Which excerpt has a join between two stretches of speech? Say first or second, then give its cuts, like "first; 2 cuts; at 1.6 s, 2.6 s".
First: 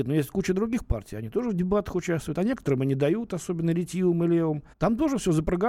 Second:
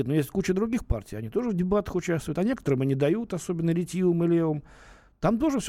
first; 1 cut; at 4.7 s